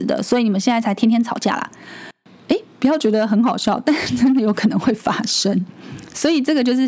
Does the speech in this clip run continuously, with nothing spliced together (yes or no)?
yes